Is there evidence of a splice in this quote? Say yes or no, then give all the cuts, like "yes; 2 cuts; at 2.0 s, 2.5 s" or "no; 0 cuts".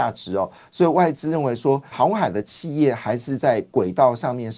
yes; 1 cut; at 1.9 s